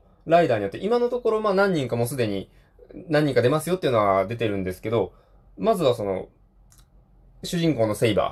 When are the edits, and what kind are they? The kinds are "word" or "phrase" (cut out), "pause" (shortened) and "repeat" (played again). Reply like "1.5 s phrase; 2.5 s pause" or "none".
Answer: none